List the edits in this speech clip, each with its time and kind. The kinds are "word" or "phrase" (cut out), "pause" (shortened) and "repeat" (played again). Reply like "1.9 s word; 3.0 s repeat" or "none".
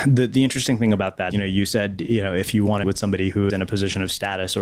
1.3 s word; 2.8 s word; 3.5 s word